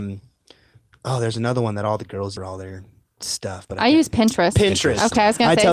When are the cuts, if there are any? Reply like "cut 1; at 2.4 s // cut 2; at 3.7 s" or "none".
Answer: cut 1; at 2.4 s